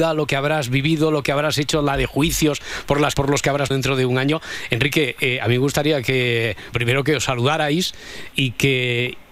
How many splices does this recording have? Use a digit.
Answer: 4